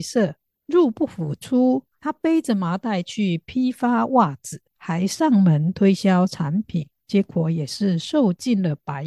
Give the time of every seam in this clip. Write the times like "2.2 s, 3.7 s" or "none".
4.7 s